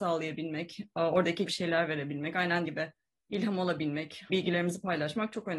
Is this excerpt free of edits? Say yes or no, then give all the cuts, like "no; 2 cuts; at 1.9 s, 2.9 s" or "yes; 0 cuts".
no; 3 cuts; at 1.5 s, 2.7 s, 4.3 s